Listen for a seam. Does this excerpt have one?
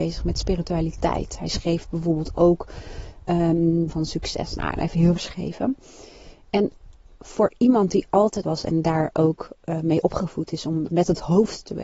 yes; 3 cuts; at 3.9 s, 5.2 s, 8.4 s

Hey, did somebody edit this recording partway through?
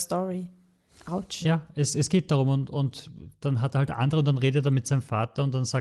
no; 0 cuts

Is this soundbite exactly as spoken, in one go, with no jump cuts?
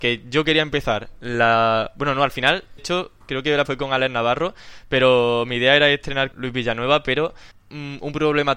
no; 4 cuts; at 2.8 s, 3.7 s, 6.3 s, 7.5 s

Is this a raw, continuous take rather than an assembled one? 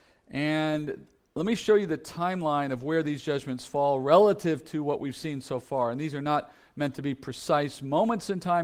yes; 0 cuts

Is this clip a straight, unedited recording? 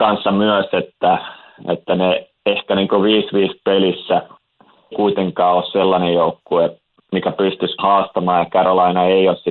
no; 2 cuts; at 4.9 s, 7.8 s

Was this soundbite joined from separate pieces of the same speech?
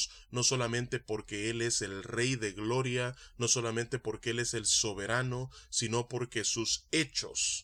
no; 0 cuts

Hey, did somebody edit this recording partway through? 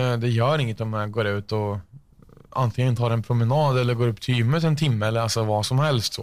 no; 0 cuts

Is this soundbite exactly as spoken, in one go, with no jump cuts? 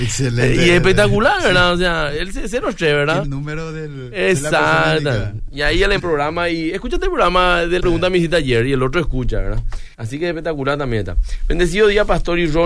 no; 4 cuts; at 3.2 s, 6.0 s, 7.8 s, 9.9 s

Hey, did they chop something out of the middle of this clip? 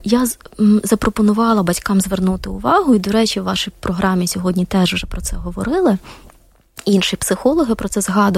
no; 0 cuts

